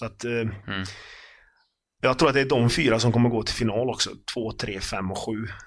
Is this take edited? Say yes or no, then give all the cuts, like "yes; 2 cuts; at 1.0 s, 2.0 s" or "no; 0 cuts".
no; 0 cuts